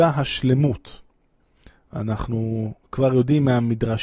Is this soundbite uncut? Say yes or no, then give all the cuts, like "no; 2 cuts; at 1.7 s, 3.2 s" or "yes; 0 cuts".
yes; 0 cuts